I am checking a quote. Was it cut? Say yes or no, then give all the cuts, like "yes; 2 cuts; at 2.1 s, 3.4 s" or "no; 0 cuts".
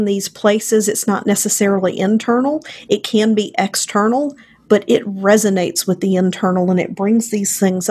no; 0 cuts